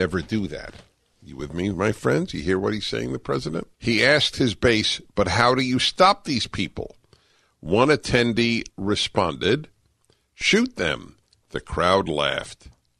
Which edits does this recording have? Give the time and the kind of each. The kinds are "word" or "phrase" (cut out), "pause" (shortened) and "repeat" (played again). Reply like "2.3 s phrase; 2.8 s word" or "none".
3.7 s pause; 8.7 s word

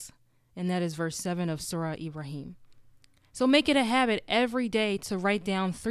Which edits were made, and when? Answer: none

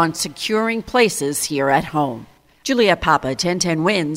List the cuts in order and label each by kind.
none

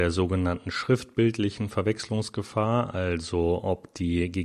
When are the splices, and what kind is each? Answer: none

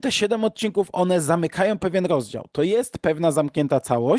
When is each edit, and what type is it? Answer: none

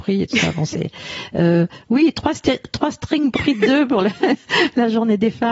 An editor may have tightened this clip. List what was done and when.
3.4 s word

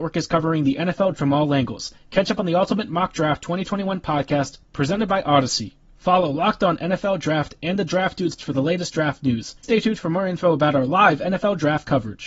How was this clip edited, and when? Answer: 1.1 s word; 8.4 s word; 9.6 s word

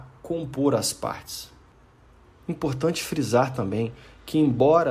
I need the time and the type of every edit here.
none

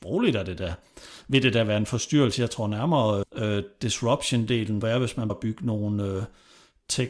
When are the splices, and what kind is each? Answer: 3.2 s word; 4.8 s word; 5.3 s word

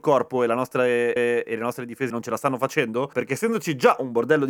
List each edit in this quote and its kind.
1.2 s repeat; 2.1 s word; 3.1 s phrase

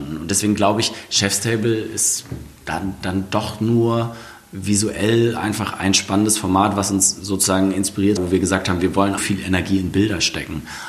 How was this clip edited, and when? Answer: 8.2 s phrase; 9.2 s phrase

